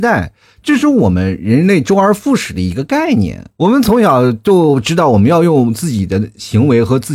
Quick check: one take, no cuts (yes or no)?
no